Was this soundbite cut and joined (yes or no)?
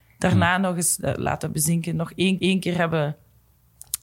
yes